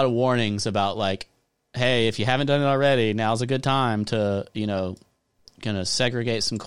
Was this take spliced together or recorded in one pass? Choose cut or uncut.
uncut